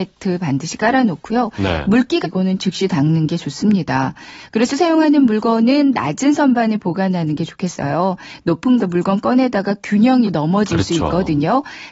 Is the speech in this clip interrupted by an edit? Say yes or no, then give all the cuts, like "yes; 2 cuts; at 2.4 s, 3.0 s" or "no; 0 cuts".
yes; 4 cuts; at 2.2 s, 4.7 s, 8.8 s, 10.2 s